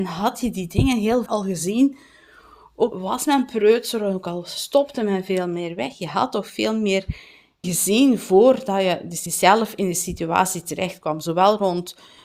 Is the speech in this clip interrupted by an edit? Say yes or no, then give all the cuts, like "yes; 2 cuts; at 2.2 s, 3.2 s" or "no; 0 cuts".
yes; 4 cuts; at 1.3 s, 2.9 s, 7.6 s, 9.3 s